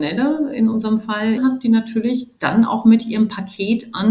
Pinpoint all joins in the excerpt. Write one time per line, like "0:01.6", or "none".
0:01.4
0:02.4